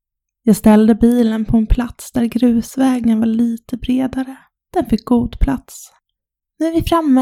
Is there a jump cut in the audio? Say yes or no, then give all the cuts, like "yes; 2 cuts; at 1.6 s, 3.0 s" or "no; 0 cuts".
no; 0 cuts